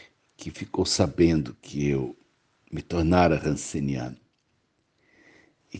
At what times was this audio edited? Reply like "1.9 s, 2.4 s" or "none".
none

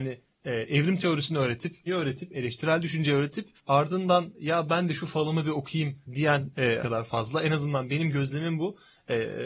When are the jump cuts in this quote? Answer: 1.9 s, 3.6 s, 6.0 s, 6.8 s

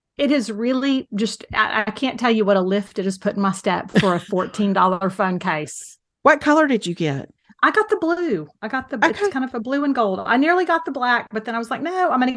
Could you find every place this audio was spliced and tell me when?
none

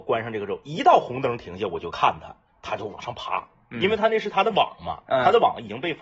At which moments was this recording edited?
none

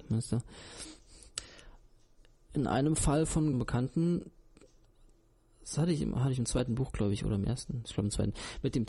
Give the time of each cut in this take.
3.5 s

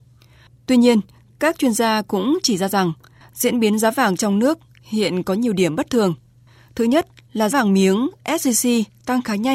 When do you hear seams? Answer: 7.5 s

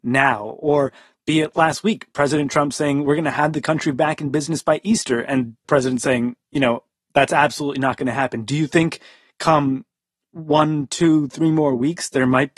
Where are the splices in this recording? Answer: 1.5 s, 5.6 s

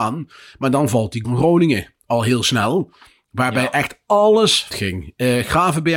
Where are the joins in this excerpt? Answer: 1.2 s, 4.7 s

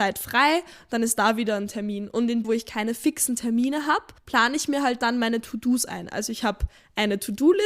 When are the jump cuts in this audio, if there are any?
2.4 s, 4.2 s

